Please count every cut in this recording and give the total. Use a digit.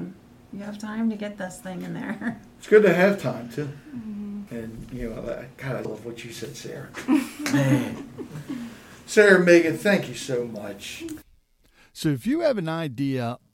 2